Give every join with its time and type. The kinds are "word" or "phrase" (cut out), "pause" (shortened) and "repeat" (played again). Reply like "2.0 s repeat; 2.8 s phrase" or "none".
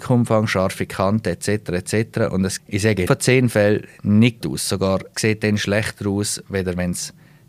2.6 s word; 3.1 s word; 4.4 s word; 5.1 s word